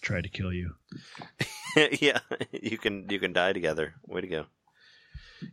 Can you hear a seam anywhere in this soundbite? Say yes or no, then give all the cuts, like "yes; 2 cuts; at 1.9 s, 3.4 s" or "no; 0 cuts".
no; 0 cuts